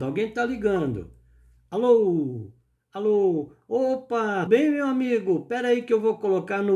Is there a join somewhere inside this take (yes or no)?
yes